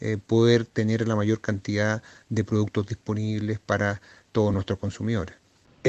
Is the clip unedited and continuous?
yes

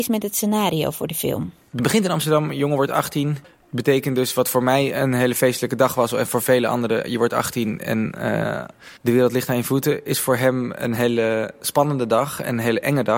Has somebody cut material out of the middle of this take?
yes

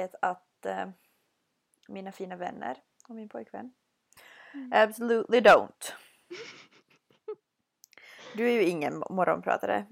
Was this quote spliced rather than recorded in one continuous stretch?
no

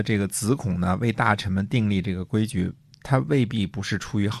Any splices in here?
no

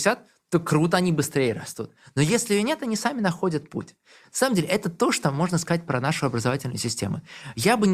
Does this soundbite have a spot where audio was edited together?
no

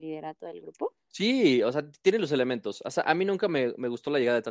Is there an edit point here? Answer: no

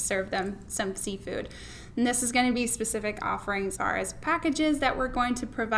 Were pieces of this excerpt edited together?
yes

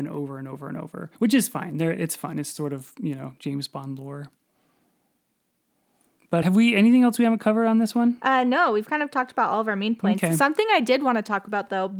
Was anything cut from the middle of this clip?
yes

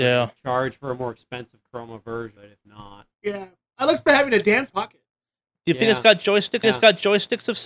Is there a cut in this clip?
yes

